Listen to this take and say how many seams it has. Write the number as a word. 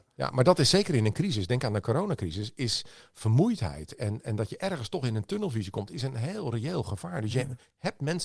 zero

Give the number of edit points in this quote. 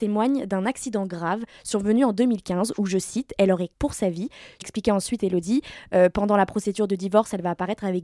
two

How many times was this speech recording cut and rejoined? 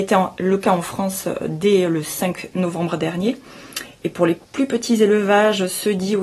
two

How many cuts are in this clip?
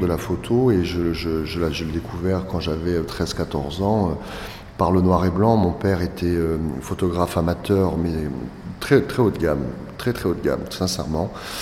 zero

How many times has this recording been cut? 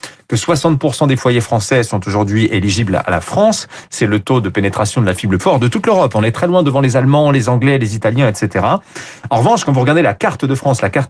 two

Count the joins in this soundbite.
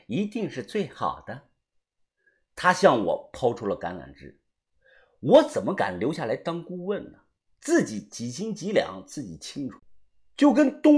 zero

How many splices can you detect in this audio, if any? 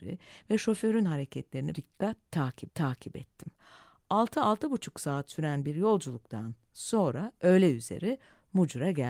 two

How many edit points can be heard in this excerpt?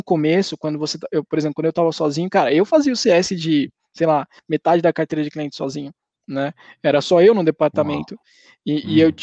zero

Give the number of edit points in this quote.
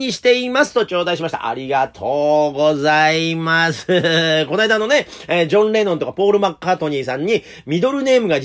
zero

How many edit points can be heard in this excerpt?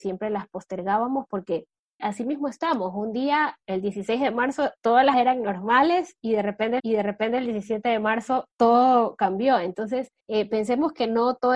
seven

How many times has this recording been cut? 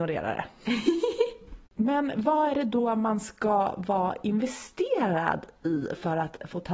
one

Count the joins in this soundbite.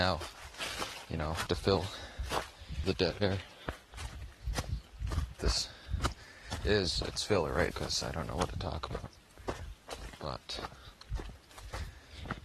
four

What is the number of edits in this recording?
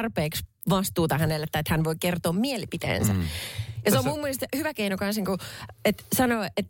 zero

